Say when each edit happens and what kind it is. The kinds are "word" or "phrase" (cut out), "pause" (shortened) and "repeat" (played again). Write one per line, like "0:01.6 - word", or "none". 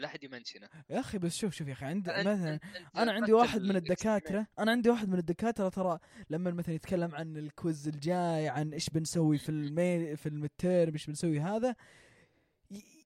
0:04.5 - pause